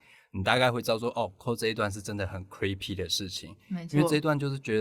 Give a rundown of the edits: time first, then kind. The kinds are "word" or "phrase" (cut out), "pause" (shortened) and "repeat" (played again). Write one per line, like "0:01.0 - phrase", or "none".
none